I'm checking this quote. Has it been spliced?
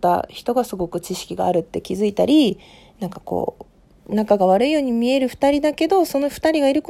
no; 0 cuts

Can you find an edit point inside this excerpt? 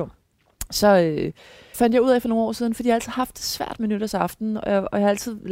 yes; 1 cut; at 1.7 s

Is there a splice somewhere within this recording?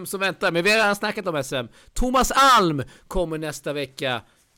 no; 0 cuts

